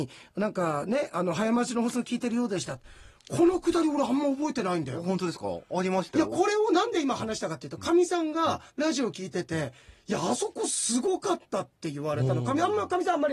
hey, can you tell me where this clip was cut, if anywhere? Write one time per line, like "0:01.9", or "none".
0:08.7